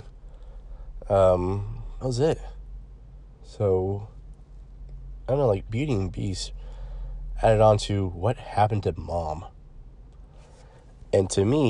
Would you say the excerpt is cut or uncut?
cut